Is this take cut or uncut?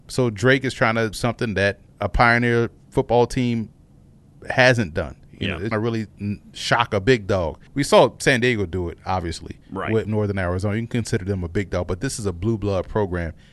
cut